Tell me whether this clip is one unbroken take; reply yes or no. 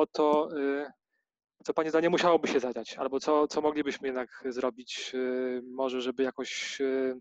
yes